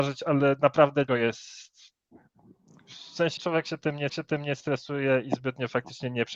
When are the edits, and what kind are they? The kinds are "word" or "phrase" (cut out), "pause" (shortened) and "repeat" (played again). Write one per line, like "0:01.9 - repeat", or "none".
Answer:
0:01.1 - word
0:03.4 - word
0:04.1 - repeat